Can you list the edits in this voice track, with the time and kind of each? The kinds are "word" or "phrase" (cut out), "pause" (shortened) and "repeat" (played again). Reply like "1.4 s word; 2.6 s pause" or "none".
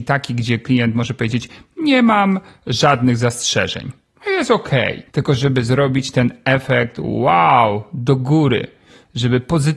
5.1 s pause